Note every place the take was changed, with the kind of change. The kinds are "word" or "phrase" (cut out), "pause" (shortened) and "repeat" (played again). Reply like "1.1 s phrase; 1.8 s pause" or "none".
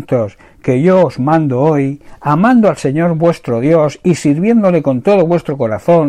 none